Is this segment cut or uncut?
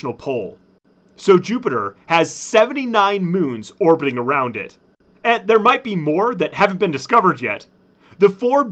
uncut